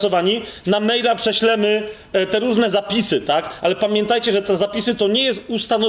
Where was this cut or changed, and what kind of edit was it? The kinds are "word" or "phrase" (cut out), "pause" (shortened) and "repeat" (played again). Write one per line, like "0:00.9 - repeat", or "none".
none